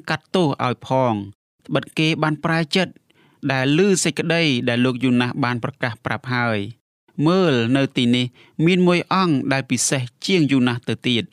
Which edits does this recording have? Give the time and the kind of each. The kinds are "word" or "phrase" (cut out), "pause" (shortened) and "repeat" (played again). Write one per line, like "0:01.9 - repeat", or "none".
none